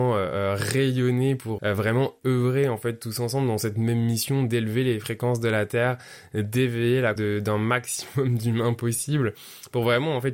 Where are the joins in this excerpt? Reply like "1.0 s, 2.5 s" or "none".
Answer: 1.6 s, 7.2 s